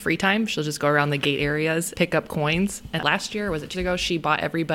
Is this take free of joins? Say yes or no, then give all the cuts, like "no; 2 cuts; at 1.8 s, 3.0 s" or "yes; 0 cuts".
no; 3 cuts; at 1.9 s, 3.0 s, 3.7 s